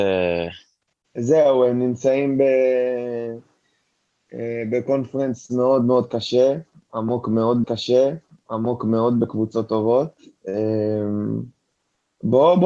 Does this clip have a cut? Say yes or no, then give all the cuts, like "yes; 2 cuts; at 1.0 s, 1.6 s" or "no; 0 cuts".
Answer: yes; 1 cut; at 7.6 s